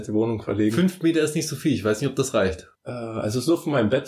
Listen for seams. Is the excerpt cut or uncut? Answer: cut